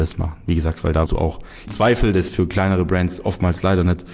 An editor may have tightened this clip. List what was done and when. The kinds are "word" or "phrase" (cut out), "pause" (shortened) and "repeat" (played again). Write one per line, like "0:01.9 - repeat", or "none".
0:01.1 - word
0:01.7 - word
0:02.3 - word